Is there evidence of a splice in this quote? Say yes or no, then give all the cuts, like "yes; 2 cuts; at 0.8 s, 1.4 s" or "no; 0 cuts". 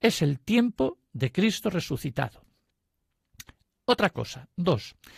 no; 0 cuts